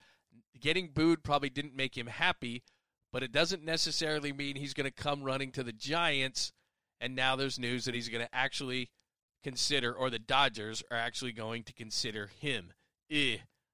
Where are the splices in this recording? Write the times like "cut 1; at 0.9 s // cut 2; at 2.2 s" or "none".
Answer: none